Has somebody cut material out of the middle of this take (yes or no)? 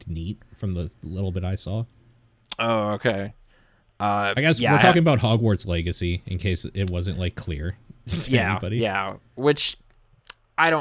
no